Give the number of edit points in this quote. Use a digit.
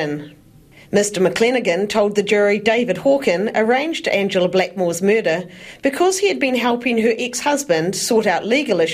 0